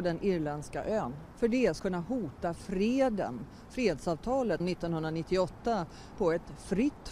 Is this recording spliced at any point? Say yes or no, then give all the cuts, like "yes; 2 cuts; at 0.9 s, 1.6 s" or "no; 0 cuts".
yes; 3 cuts; at 1.8 s, 4.6 s, 6.1 s